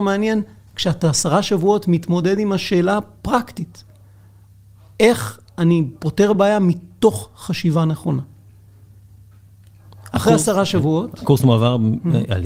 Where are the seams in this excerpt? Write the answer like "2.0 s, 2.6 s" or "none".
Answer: none